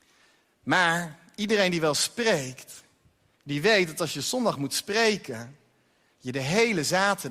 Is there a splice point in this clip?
no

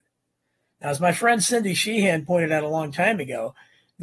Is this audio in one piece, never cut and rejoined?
yes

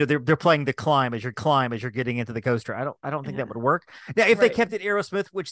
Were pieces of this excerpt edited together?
yes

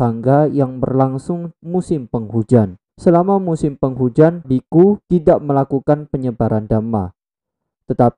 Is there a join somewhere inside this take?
yes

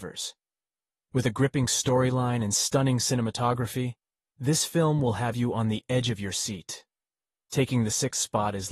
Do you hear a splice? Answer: no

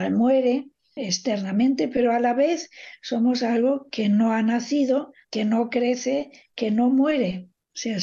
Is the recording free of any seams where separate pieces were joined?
no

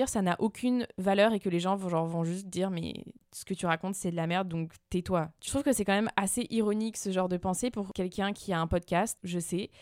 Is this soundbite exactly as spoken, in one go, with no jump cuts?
no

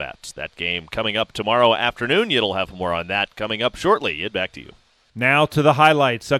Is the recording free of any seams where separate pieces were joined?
yes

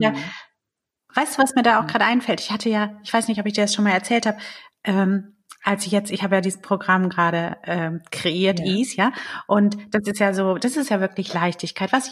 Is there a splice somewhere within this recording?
no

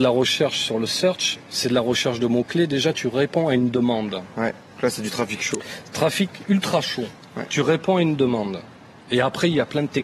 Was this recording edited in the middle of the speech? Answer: no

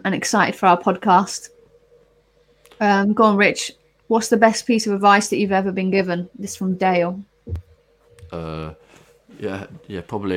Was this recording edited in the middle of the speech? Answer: no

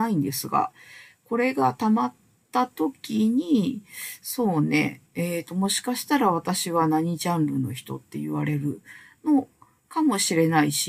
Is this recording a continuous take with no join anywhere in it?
no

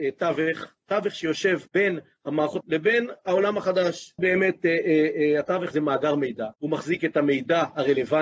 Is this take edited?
yes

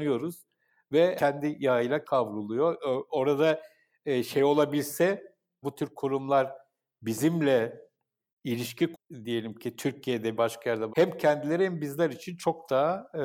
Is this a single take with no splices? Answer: no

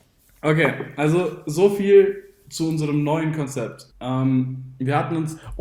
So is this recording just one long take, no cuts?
no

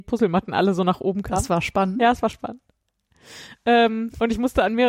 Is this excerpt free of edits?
yes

